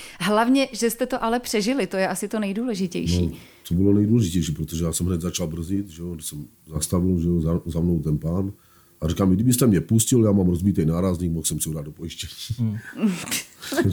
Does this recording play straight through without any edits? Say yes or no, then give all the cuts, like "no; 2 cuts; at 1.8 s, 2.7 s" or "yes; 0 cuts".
yes; 0 cuts